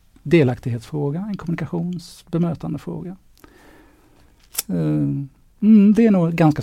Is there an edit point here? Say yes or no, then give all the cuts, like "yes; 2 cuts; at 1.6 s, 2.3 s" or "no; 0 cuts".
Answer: no; 0 cuts